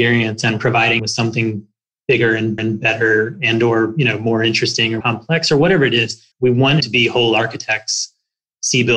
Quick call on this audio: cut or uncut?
cut